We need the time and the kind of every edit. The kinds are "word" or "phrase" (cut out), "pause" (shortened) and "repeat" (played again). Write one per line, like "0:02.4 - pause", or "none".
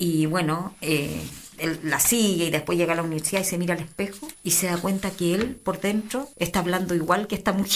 0:04.4 - pause
0:06.3 - pause